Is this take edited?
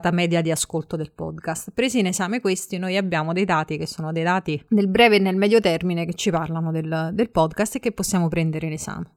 no; 0 cuts

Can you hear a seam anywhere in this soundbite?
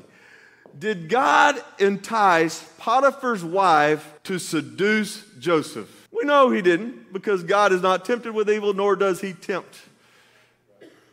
yes; 2 cuts; at 4.2 s, 6.1 s

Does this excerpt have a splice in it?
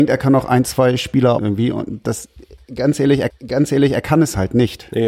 yes; 2 cuts; at 1.4 s, 3.3 s

